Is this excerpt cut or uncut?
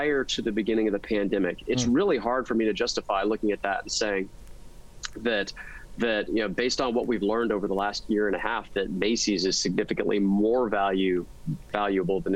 uncut